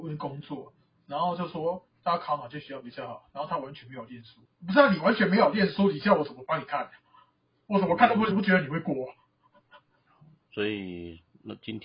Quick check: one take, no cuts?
no; 3 cuts; at 4.4 s, 8.3 s, 10.4 s

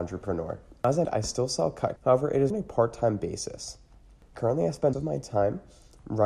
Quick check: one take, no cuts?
no; 4 cuts; at 1.0 s, 2.0 s, 2.5 s, 4.9 s

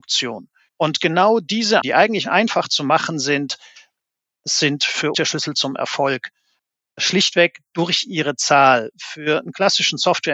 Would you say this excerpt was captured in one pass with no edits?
no; 2 cuts; at 1.8 s, 5.1 s

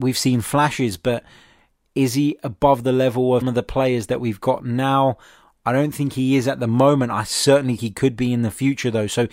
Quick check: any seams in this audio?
yes; 2 cuts; at 3.4 s, 7.8 s

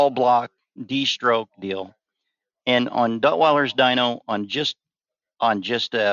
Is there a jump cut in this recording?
no; 0 cuts

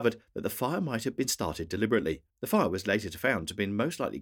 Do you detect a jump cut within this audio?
yes; 1 cut; at 2.3 s

